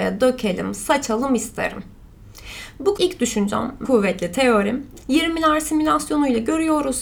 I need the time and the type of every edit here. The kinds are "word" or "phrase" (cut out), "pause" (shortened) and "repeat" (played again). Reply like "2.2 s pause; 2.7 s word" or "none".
3.0 s word; 3.8 s word; 5.0 s pause